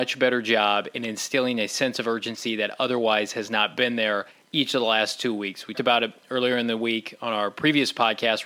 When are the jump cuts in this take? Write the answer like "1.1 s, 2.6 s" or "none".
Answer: 4.3 s, 5.7 s